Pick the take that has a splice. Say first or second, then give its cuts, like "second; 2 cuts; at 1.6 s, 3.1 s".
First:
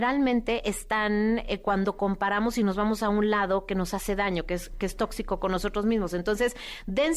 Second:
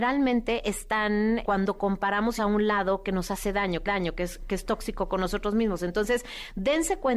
second; 3 cuts; at 1.4 s, 2.4 s, 3.9 s